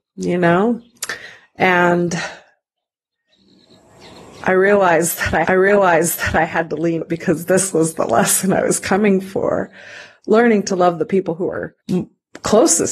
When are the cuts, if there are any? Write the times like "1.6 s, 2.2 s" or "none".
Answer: 5.5 s, 7.0 s, 11.8 s